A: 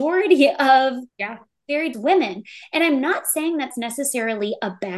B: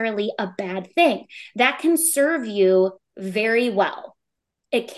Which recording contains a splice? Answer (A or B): A